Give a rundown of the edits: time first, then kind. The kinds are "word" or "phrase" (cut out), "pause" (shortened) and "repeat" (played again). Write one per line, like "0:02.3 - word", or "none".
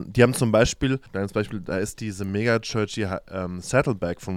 0:01.1 - pause